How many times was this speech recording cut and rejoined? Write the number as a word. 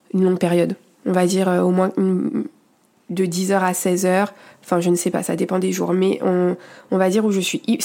zero